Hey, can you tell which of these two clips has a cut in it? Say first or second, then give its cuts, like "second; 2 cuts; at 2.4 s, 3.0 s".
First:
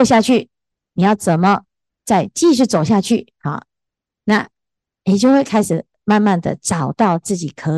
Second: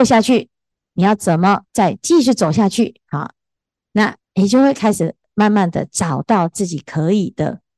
second; 2 cuts; at 1.7 s, 4.2 s